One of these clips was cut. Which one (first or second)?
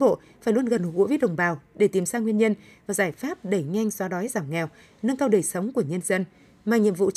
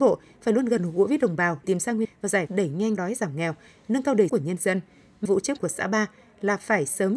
second